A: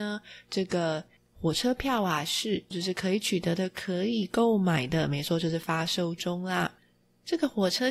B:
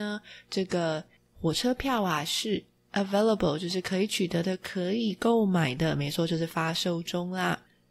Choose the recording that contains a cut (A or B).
A